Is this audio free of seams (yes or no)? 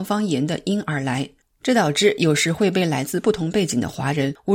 yes